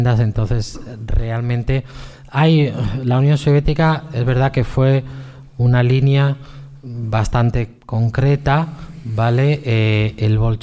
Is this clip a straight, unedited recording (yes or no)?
no